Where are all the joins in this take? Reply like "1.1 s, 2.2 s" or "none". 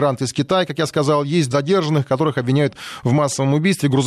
1.5 s

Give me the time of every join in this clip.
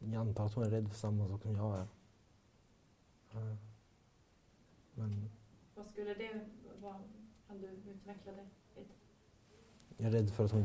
none

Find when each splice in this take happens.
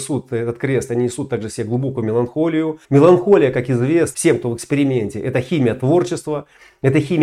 2.8 s, 4.1 s

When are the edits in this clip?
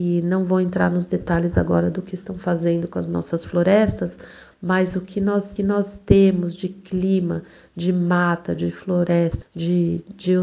5.6 s, 9.4 s

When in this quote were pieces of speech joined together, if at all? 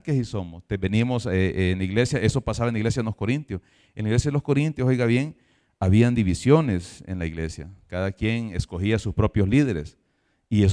none

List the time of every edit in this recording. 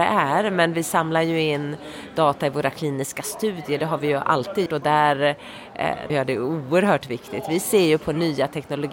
4.7 s, 6.1 s

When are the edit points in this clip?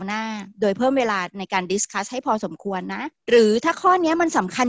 none

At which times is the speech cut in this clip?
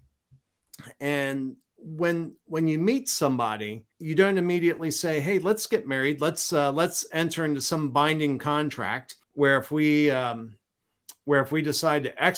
3.9 s, 9.2 s

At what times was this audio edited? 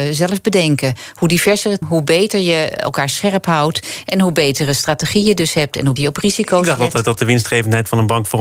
1.8 s, 2.8 s, 6.0 s

